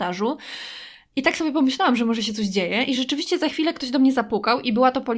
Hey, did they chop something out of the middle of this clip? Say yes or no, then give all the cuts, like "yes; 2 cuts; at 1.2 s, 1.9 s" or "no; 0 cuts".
no; 0 cuts